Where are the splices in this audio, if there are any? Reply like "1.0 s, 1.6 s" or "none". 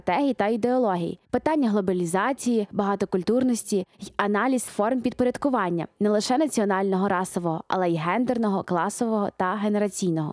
1.2 s, 3.9 s, 4.7 s